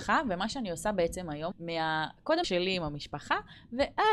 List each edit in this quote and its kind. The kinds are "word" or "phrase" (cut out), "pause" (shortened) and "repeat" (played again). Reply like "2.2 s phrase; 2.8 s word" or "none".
1.5 s word; 2.4 s word